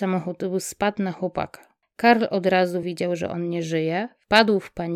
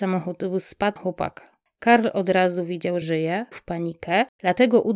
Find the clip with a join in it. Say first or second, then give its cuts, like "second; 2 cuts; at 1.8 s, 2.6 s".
second; 3 cuts; at 1.0 s, 3.0 s, 3.5 s